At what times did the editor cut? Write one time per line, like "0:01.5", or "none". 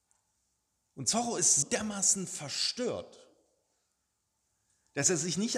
0:01.6